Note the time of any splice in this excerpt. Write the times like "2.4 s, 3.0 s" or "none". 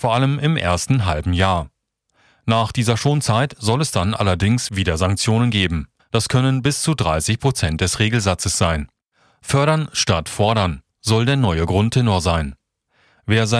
6.0 s, 9.1 s, 10.9 s